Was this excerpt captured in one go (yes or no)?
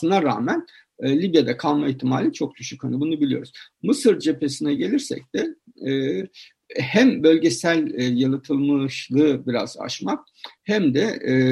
yes